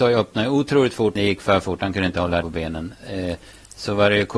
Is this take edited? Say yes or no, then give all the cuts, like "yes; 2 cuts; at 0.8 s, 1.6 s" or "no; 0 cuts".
yes; 2 cuts; at 1.2 s, 2.4 s